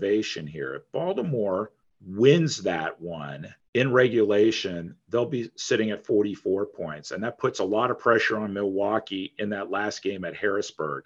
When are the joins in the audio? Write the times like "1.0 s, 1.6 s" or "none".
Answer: 1.8 s, 3.6 s